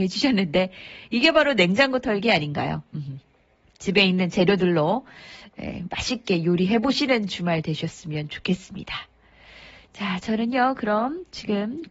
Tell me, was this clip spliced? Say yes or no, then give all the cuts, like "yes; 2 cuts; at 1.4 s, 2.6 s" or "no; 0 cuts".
no; 0 cuts